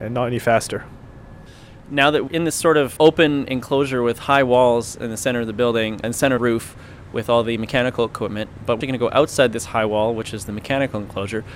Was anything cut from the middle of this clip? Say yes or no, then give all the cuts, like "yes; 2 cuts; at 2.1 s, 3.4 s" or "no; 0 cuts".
yes; 5 cuts; at 2.3 s, 3.0 s, 6.0 s, 6.4 s, 8.8 s